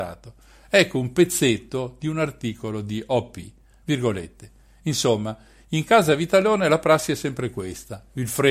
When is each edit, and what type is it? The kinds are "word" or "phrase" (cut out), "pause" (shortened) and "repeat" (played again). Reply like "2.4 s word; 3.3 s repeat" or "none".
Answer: none